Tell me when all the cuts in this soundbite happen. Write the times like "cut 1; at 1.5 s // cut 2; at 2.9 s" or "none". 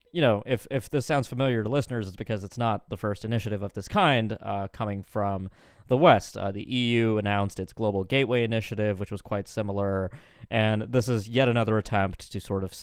none